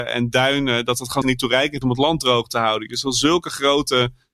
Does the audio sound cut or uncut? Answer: cut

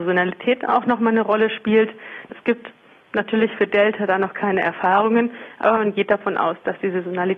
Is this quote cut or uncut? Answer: uncut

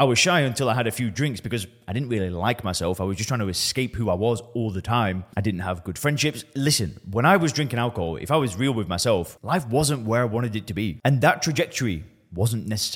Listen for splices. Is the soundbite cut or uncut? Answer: uncut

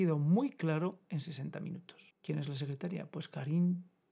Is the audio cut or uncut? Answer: cut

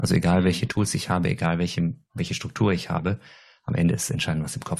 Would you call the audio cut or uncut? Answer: uncut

